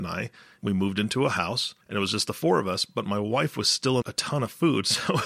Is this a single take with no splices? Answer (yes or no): no